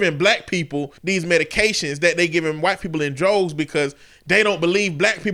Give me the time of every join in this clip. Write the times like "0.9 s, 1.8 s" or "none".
1.0 s